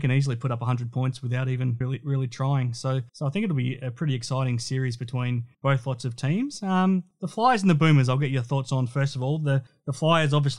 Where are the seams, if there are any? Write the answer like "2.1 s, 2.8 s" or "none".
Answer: 1.8 s, 3.1 s, 5.5 s